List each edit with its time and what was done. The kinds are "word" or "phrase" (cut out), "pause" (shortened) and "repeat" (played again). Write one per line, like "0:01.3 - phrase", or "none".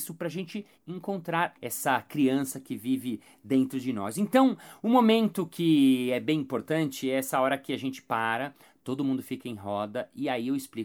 none